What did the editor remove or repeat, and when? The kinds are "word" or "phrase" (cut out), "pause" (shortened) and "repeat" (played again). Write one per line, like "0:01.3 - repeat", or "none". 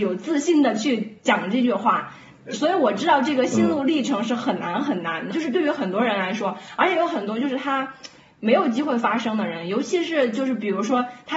0:05.3 - word

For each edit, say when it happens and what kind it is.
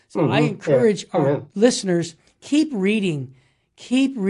none

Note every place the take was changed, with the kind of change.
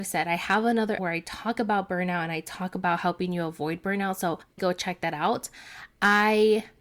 0:01.0 - word
0:04.6 - word

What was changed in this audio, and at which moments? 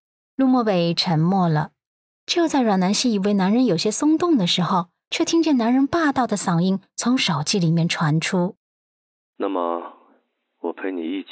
none

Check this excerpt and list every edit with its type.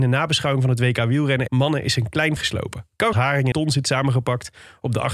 0:01.5 - word
0:02.4 - word
0:03.1 - phrase
0:03.5 - word

